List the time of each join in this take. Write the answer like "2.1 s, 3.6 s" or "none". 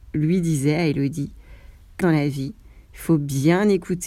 2.0 s